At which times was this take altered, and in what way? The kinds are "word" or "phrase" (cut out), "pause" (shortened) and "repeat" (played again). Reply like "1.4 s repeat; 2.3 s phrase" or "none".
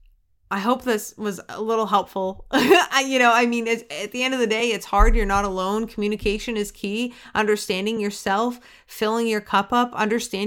none